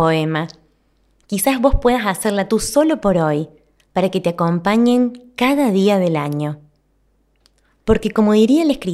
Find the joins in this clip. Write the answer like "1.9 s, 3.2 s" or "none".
2.5 s